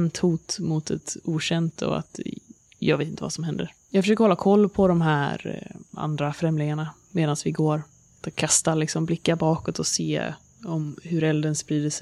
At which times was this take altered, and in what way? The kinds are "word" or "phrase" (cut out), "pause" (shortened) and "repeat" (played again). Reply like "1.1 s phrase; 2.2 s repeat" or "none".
none